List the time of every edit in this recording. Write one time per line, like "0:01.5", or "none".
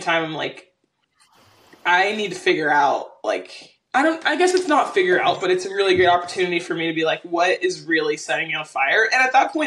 0:03.9